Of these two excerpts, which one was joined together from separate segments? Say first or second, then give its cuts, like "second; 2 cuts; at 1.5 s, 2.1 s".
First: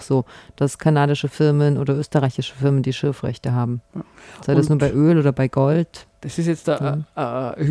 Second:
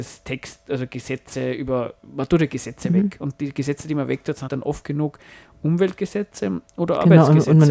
second; 1 cut; at 4.5 s